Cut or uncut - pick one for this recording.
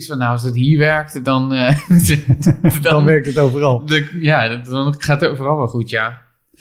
uncut